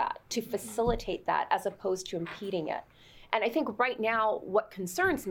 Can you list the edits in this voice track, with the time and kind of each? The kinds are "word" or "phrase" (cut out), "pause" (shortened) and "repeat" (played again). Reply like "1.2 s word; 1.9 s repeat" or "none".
none